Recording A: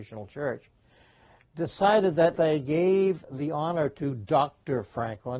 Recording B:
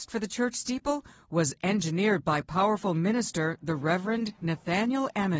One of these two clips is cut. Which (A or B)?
A